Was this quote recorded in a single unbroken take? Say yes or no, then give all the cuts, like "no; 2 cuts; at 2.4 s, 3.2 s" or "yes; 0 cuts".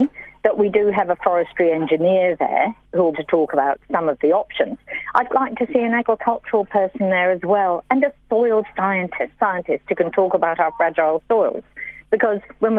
no; 3 cuts; at 3.1 s, 5.3 s, 9.4 s